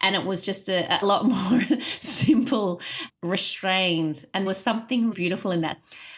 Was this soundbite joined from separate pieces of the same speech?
yes; 4 cuts; at 1.0 s, 3.1 s, 4.5 s, 5.1 s

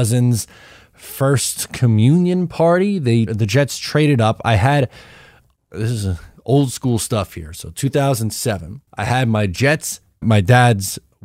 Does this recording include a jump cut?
yes; 3 cuts; at 3.3 s, 8.9 s, 10.2 s

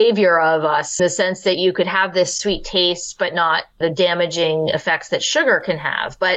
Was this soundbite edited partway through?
yes; 2 cuts; at 1.0 s, 3.8 s

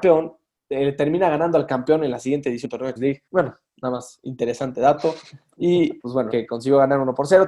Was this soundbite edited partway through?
yes; 5 cuts; at 2.6 s, 3.0 s, 3.3 s, 6.0 s, 6.3 s

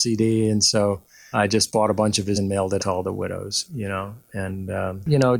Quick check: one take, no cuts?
no; 3 cuts; at 1.3 s, 2.3 s, 2.8 s

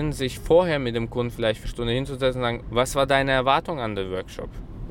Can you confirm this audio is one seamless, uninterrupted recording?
no; 2 cuts; at 1.6 s, 2.6 s

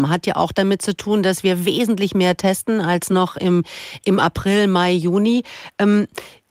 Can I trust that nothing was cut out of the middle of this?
yes; 0 cuts

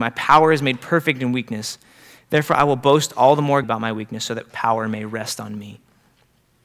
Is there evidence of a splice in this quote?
yes; 2 cuts; at 3.6 s, 4.5 s

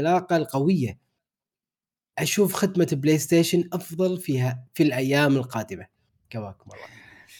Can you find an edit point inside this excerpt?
no; 0 cuts

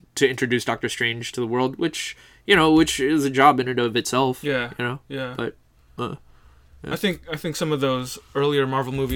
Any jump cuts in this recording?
no; 0 cuts

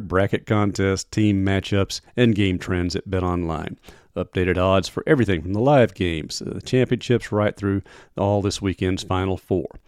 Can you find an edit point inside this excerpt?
no; 0 cuts

